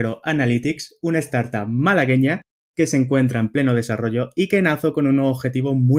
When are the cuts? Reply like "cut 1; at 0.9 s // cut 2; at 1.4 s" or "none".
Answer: none